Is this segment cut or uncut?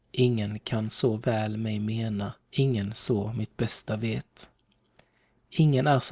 cut